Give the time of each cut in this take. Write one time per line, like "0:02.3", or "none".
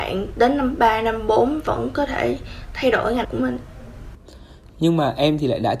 0:03.2